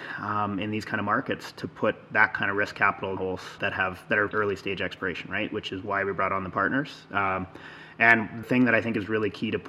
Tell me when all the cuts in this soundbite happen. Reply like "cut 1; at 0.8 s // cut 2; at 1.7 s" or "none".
cut 1; at 3.2 s // cut 2; at 3.6 s // cut 3; at 4.3 s // cut 4; at 8.4 s